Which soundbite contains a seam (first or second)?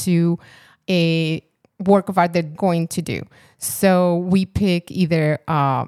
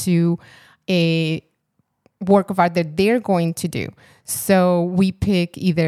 first